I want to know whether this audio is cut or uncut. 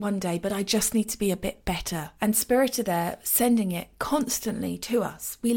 cut